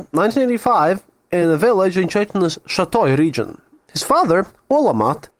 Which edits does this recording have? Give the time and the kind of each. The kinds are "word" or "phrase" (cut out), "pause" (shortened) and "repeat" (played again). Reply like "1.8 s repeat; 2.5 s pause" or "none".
none